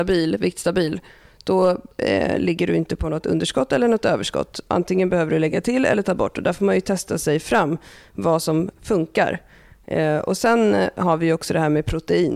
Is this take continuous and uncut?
yes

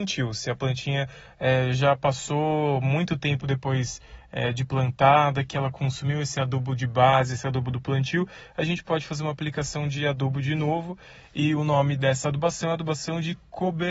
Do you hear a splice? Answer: no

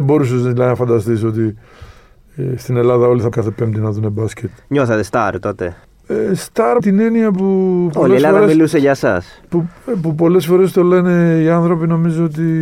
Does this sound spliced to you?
yes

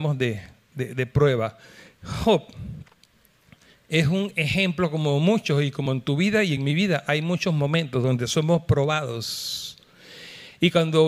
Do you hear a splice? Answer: no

